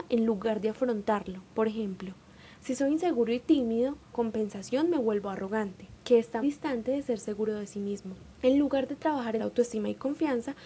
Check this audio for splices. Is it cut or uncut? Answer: cut